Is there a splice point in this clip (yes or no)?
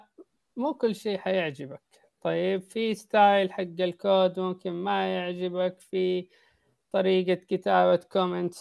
no